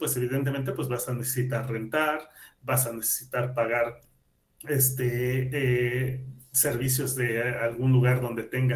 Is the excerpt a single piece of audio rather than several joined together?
yes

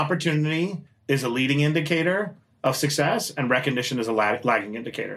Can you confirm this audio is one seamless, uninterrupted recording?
yes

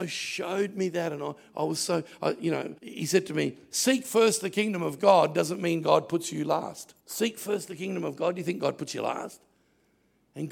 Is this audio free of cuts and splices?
no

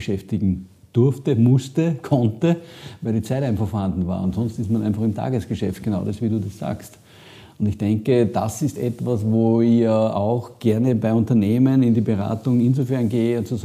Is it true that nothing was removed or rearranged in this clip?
yes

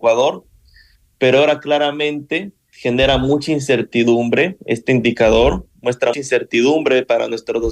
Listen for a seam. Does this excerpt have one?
yes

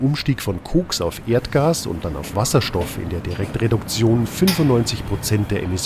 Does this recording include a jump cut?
no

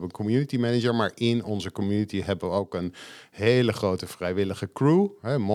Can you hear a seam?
no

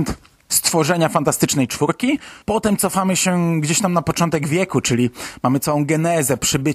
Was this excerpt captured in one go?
no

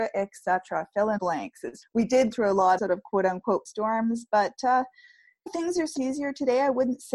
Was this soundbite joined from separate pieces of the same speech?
yes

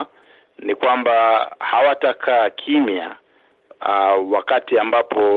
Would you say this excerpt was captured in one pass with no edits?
yes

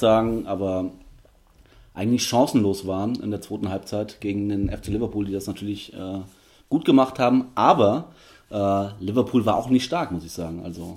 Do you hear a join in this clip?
no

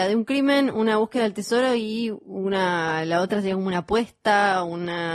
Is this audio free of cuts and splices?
yes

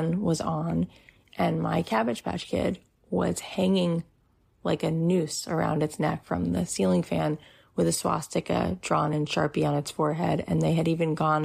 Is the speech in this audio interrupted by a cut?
no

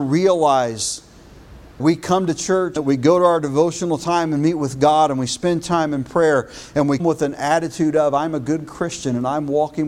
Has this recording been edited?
yes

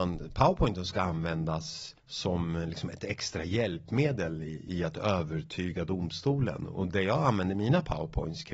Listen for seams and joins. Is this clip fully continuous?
no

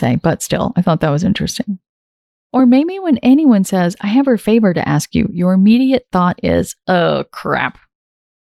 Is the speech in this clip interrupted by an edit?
no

